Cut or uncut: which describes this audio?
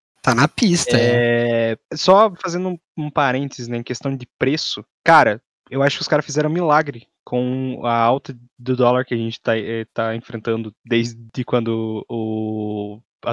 uncut